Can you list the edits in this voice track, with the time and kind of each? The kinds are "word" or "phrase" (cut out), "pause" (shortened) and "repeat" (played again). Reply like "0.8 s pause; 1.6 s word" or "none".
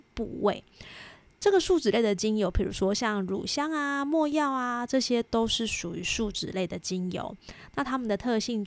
none